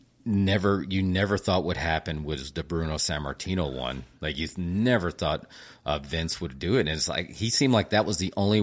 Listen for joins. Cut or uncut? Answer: uncut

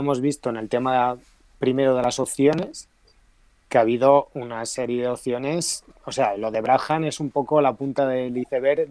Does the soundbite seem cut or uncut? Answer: uncut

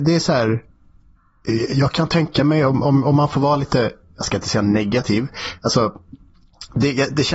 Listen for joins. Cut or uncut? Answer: uncut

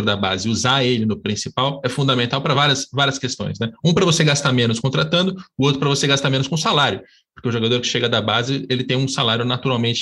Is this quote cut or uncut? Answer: uncut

